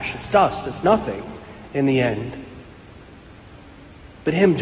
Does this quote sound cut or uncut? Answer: uncut